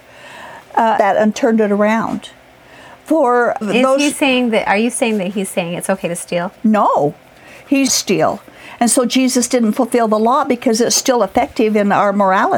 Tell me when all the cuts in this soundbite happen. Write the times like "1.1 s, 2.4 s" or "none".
1.0 s, 3.6 s, 6.6 s, 7.9 s

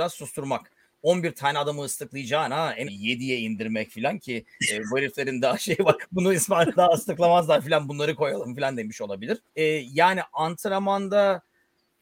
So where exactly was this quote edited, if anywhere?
2.9 s, 6.8 s, 9.5 s

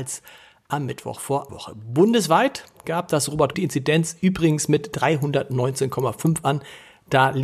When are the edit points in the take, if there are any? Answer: 1.5 s, 3.5 s

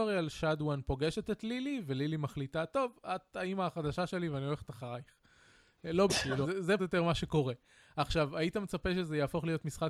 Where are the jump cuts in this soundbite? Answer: 6.1 s, 6.4 s, 6.8 s

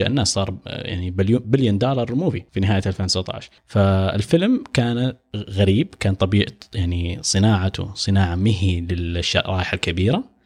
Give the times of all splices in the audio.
2.5 s, 3.6 s

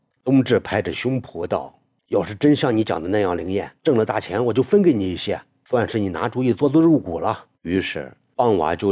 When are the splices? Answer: 3.8 s, 7.5 s

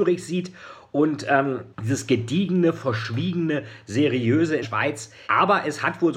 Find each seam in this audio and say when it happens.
1.7 s, 4.6 s, 5.3 s

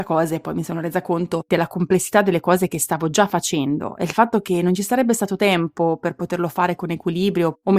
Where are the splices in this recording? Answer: none

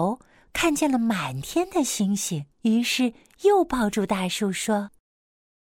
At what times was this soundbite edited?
2.5 s

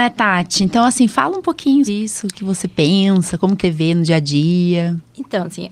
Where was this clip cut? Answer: 1.9 s, 2.3 s, 3.6 s

